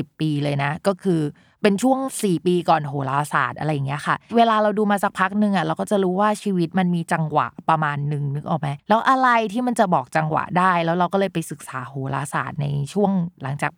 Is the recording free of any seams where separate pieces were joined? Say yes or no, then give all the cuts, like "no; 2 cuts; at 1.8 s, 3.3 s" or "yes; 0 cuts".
no; 1 cut; at 8.8 s